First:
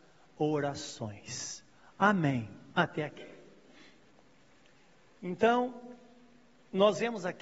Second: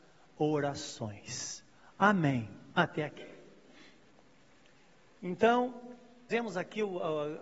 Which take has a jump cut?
second; 1 cut; at 6.3 s

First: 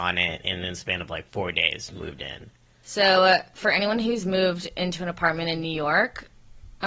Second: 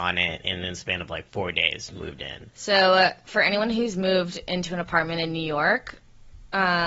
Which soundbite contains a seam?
second; 1 cut; at 2.5 s

